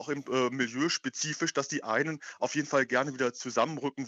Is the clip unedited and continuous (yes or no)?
yes